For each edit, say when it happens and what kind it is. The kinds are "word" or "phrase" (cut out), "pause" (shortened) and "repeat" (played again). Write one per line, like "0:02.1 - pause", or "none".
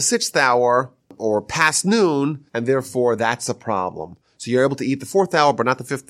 0:01.0 - pause
0:02.5 - pause